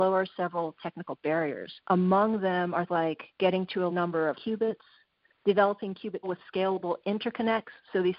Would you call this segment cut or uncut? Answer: cut